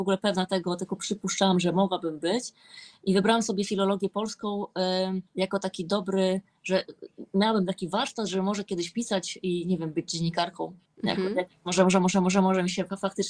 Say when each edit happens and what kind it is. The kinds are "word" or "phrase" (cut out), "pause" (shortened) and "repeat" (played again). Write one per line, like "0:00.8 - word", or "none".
0:05.3 - pause
0:10.9 - pause